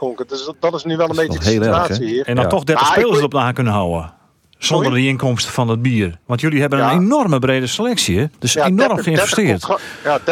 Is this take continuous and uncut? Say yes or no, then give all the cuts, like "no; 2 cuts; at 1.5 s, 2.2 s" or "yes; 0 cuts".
no; 2 cuts; at 6.2 s, 8.3 s